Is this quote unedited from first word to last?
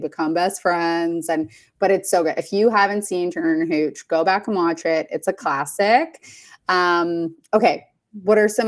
yes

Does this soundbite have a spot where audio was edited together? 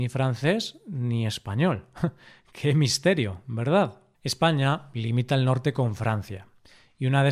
yes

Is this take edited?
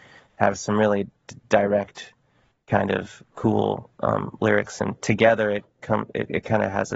yes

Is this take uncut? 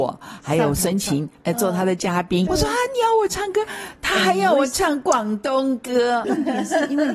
no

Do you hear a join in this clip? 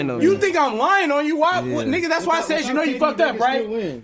no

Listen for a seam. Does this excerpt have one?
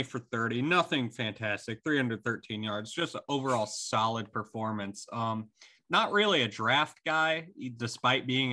no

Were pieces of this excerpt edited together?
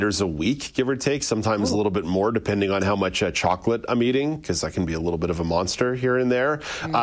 no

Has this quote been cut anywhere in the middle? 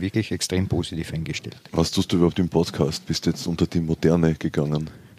no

